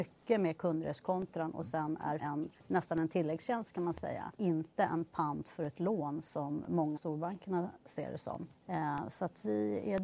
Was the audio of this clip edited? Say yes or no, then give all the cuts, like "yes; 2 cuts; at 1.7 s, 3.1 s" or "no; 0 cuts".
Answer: yes; 5 cuts; at 2.2 s, 2.6 s, 4.3 s, 7.0 s, 8.5 s